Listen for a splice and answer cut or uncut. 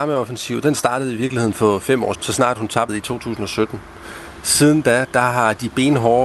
cut